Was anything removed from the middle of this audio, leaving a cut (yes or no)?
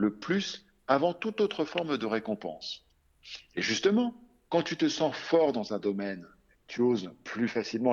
no